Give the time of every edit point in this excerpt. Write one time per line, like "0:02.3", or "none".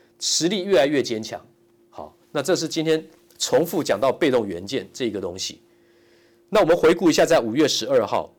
0:02.2